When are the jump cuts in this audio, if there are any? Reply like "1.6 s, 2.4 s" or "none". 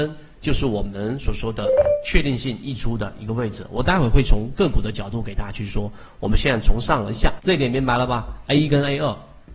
7.4 s